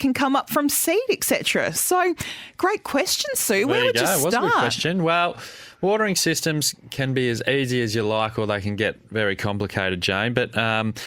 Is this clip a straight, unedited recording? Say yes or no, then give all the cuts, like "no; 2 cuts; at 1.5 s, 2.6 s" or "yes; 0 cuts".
yes; 0 cuts